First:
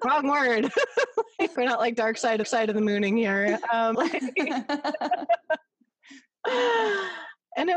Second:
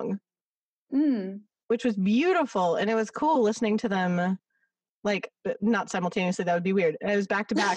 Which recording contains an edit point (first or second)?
first